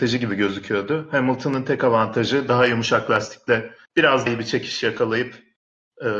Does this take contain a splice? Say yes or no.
yes